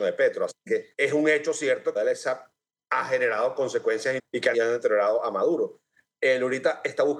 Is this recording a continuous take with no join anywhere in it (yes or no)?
no